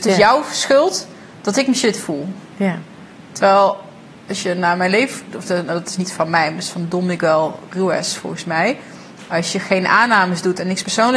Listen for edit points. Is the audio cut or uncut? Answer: uncut